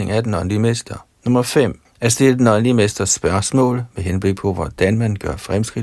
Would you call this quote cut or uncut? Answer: cut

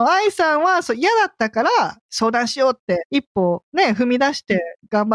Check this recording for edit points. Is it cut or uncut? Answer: cut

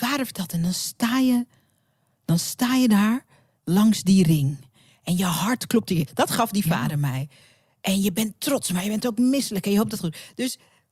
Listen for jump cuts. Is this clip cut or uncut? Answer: uncut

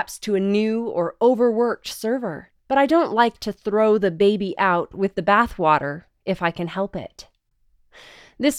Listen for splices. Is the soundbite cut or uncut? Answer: cut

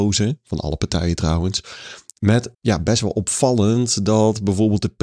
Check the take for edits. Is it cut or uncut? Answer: cut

